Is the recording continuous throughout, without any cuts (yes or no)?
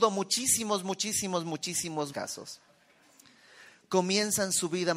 no